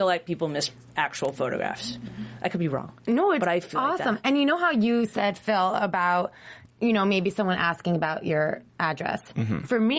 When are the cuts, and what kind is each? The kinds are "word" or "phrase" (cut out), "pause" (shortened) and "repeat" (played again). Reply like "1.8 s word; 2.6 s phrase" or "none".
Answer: 6.7 s pause; 8.7 s pause